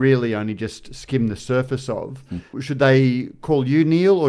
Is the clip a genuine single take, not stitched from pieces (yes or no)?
no